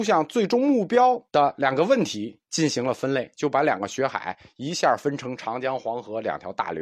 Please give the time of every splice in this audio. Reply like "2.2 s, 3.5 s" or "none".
1.3 s, 2.4 s